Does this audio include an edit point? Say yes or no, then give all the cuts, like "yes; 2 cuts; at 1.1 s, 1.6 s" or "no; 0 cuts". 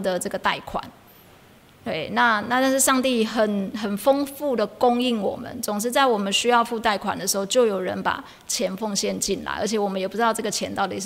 no; 0 cuts